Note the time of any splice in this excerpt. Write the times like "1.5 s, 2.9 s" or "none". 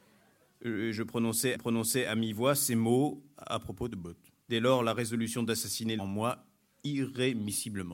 1.5 s, 4.4 s, 6.0 s